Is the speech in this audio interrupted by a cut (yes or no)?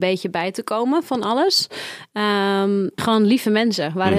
yes